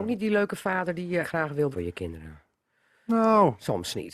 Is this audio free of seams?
no; 2 cuts; at 1.2 s, 1.7 s

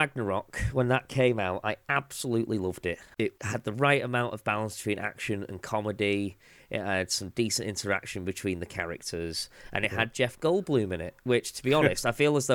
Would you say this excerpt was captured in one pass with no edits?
yes; 0 cuts

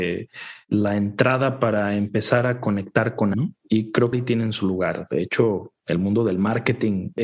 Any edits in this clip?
yes; 2 cuts; at 3.3 s, 4.1 s

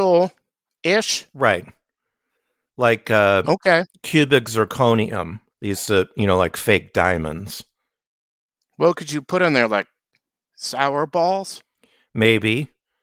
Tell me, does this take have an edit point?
yes; 1 cut; at 5.5 s

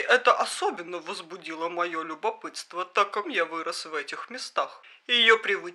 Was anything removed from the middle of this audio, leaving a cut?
yes; 1 cut; at 3.2 s

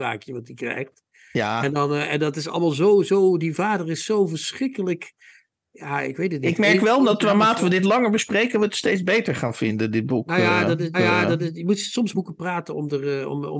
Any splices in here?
yes; 2 cuts; at 10.9 s, 12.1 s

